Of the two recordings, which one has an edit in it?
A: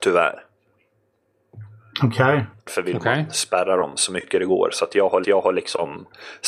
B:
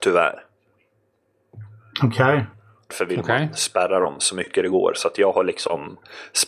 A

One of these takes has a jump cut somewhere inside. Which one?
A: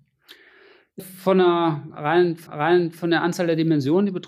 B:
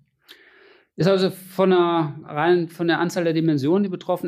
A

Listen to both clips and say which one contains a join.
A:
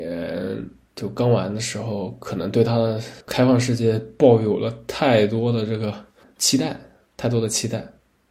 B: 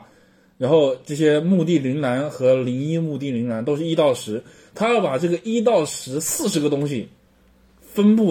A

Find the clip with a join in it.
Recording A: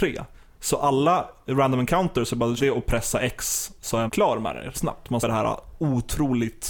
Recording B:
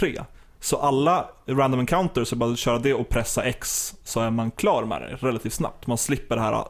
A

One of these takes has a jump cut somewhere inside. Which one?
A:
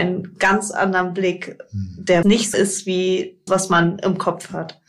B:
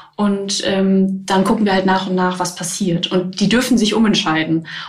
A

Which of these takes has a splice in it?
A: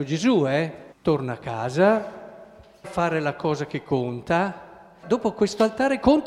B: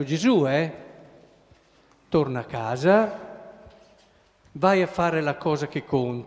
A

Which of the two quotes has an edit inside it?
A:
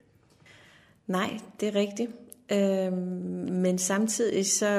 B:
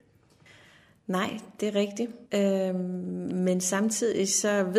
B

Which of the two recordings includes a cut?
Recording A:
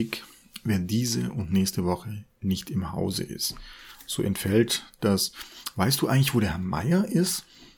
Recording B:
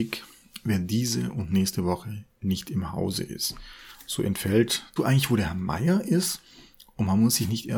B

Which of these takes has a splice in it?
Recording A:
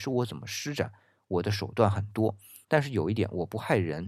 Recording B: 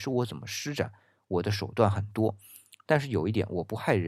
A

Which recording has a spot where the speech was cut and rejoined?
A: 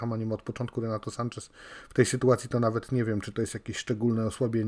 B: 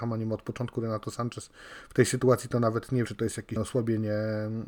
B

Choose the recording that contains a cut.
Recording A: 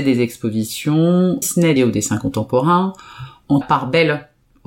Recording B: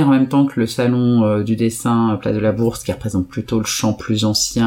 A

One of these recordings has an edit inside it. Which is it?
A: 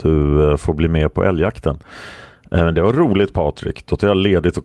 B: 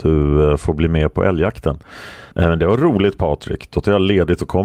B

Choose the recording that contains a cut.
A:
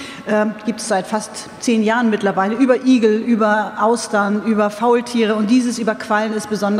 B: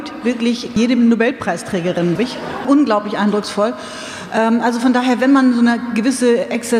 B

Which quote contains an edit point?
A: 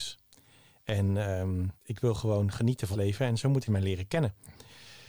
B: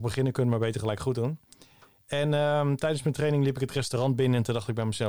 A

